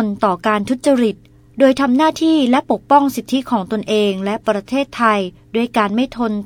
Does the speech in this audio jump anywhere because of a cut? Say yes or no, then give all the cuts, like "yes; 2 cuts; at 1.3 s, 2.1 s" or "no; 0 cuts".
no; 0 cuts